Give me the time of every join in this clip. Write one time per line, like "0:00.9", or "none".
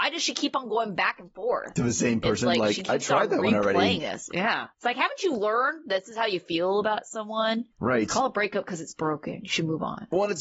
0:04.7
0:07.7